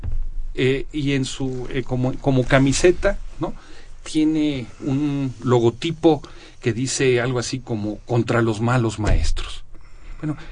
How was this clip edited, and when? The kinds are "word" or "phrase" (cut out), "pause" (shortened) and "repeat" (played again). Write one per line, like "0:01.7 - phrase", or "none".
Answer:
0:01.7 - word